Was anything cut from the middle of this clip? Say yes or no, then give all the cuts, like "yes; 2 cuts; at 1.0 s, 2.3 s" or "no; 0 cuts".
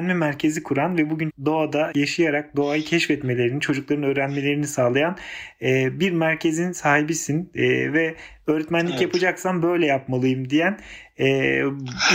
yes; 2 cuts; at 1.3 s, 1.9 s